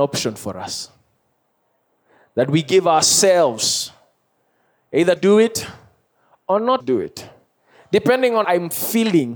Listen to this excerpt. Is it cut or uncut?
cut